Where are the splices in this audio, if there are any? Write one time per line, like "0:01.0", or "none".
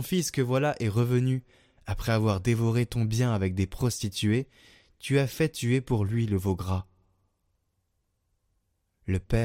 none